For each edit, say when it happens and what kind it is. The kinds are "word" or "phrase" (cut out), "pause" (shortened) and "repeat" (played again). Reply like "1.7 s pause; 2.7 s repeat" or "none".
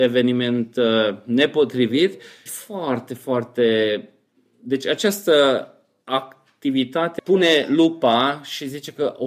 2.5 s word; 7.2 s phrase